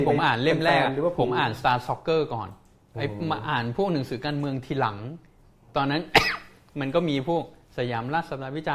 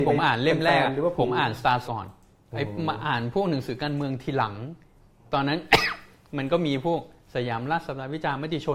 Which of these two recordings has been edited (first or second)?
second